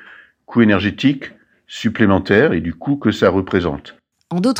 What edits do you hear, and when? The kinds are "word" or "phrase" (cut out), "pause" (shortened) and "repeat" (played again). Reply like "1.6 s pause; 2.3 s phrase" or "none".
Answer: none